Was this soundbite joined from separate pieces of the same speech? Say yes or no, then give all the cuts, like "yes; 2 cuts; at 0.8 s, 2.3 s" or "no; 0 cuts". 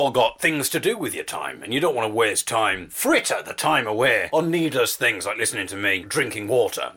no; 0 cuts